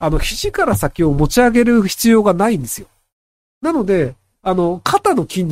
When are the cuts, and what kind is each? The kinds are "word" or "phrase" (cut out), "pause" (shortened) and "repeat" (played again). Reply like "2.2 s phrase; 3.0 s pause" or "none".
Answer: none